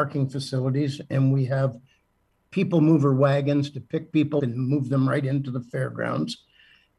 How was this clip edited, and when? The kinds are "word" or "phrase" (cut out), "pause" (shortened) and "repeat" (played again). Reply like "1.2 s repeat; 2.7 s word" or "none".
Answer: 4.4 s word